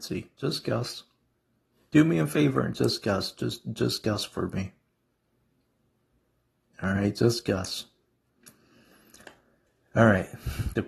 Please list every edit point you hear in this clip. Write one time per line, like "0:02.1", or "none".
none